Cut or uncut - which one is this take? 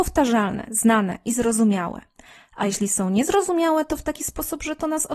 uncut